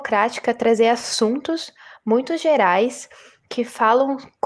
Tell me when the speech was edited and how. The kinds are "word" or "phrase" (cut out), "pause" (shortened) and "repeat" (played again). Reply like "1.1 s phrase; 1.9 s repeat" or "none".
none

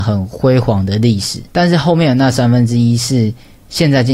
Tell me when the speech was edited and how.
1.5 s pause

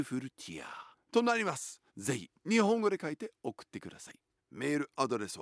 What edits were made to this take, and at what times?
0.9 s pause; 1.9 s pause; 4.4 s pause

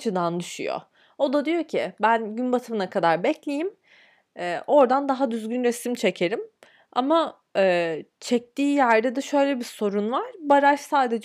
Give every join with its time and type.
none

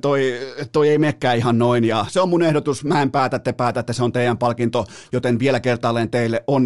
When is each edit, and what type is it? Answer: none

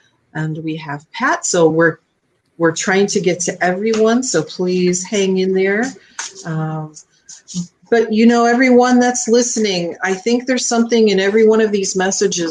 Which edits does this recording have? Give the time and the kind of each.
none

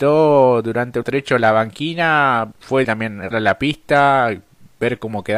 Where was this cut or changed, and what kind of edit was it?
1.0 s word; 2.5 s word; 2.8 s word; 3.3 s word

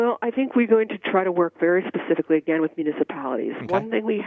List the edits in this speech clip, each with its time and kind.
none

